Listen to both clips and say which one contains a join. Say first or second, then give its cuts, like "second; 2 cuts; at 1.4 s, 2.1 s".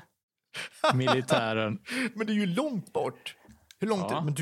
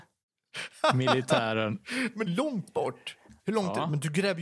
second; 2 cuts; at 2.3 s, 3.4 s